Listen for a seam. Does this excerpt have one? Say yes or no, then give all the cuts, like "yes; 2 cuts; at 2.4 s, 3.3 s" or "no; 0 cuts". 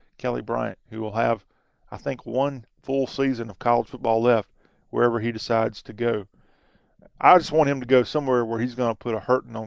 no; 0 cuts